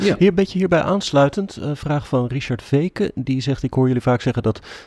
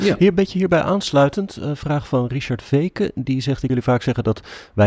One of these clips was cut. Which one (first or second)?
second